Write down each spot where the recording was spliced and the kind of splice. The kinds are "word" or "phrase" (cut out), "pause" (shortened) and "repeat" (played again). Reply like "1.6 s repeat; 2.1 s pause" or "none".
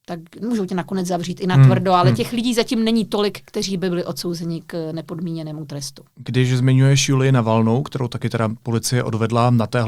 none